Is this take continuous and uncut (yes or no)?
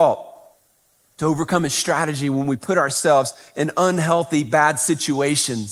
yes